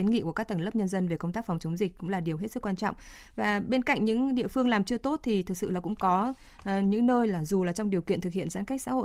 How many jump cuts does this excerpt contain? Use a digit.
0